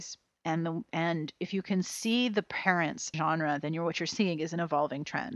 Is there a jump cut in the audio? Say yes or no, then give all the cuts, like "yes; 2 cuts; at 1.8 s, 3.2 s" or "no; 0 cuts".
yes; 1 cut; at 3.1 s